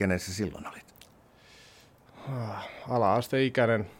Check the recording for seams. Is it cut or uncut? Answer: uncut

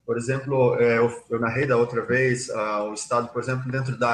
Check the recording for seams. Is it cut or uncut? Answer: uncut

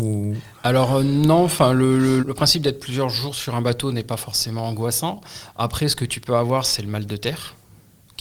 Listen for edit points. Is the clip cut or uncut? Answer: cut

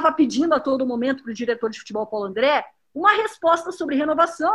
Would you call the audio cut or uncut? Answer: uncut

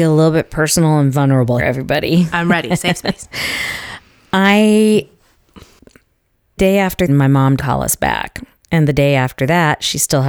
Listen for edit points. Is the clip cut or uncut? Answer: cut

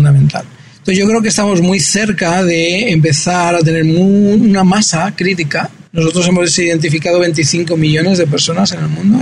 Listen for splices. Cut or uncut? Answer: cut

